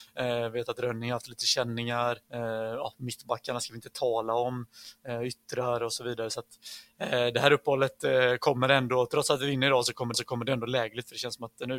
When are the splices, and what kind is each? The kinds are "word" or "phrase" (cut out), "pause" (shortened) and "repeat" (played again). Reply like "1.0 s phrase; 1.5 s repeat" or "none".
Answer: 2.2 s pause; 10.1 s repeat